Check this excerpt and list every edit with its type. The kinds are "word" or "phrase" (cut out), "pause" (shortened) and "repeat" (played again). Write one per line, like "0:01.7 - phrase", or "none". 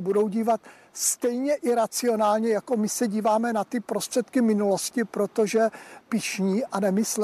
0:06.0 - word